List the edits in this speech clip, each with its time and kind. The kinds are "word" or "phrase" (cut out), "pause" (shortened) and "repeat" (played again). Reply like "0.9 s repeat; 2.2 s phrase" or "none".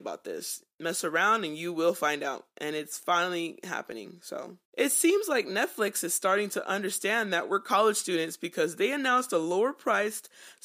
4.7 s pause